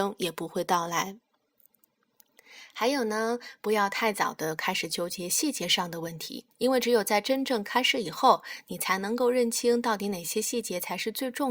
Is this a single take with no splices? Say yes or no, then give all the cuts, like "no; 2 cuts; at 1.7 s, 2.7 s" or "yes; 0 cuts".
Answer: no; 1 cut; at 6.5 s